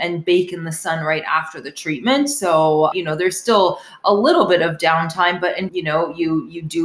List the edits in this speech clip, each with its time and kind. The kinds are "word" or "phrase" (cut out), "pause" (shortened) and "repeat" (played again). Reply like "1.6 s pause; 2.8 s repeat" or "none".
2.9 s word; 5.7 s phrase